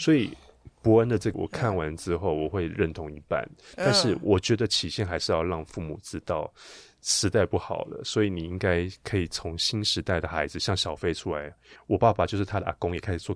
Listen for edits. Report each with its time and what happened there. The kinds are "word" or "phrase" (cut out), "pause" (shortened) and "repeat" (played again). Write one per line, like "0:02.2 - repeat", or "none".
0:01.3 - word